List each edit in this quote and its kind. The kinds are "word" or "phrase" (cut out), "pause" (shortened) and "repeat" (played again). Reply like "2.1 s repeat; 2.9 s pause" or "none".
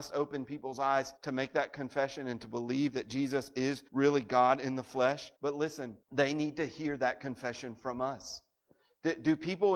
1.2 s pause; 3.9 s pause; 5.3 s pause; 6.0 s pause